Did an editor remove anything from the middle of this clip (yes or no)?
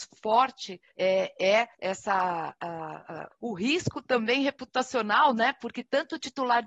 yes